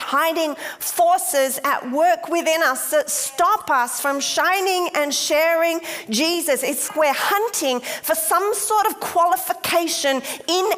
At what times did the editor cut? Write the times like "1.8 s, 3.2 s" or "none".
6.9 s